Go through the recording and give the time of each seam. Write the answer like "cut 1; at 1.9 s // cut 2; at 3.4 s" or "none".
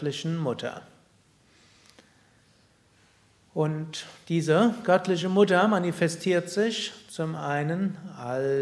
none